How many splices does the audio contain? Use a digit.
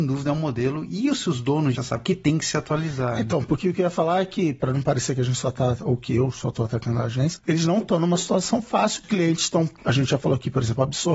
3